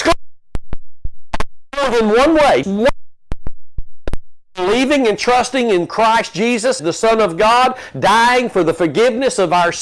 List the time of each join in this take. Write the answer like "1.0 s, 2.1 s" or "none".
2.6 s, 6.8 s